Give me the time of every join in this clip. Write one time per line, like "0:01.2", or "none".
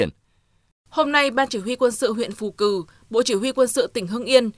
none